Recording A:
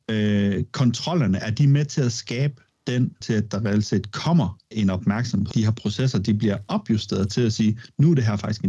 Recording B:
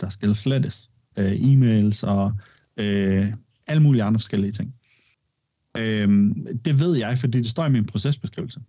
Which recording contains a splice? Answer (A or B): A